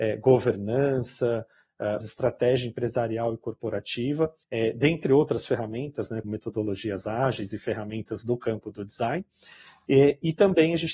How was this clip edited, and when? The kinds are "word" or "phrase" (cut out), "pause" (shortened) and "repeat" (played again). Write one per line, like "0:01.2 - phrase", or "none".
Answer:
0:02.0 - word
0:04.4 - pause
0:06.2 - word